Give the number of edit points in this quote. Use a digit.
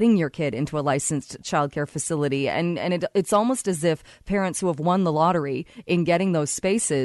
0